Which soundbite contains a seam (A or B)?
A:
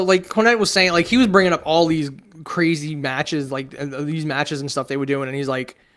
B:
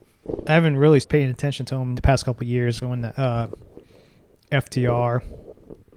B